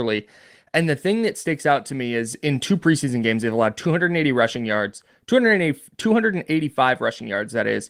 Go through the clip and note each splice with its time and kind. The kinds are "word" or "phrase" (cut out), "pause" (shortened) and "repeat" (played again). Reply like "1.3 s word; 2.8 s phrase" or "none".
none